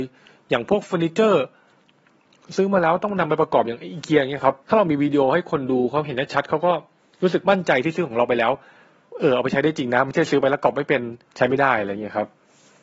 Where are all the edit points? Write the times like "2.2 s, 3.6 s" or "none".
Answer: 4.6 s